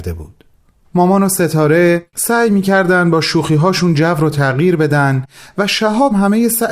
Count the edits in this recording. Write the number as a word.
zero